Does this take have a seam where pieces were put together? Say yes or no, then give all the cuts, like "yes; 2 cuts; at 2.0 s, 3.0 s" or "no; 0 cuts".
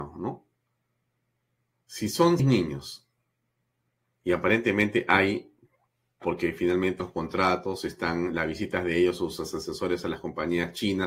yes; 3 cuts; at 2.4 s, 6.2 s, 7.0 s